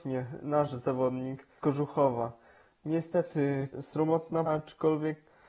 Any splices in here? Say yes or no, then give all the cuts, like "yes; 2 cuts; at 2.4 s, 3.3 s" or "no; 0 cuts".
yes; 3 cuts; at 1.6 s, 3.7 s, 4.5 s